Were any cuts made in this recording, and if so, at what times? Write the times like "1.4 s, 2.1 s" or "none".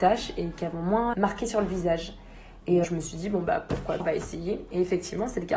1.1 s, 2.8 s, 4.0 s

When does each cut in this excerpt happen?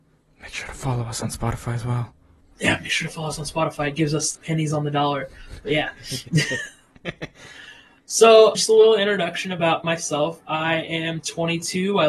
2.4 s, 4.3 s, 8.5 s, 9.8 s

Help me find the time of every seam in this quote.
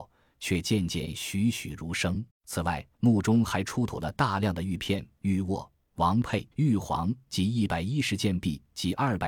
2.3 s, 2.9 s, 6.5 s

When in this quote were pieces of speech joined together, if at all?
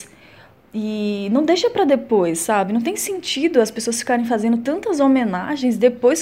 none

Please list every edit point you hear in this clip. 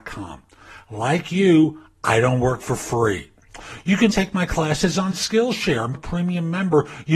4.1 s, 5.9 s

